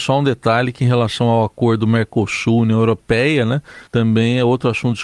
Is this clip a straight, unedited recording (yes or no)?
no